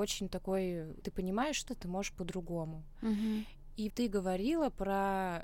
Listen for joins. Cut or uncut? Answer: cut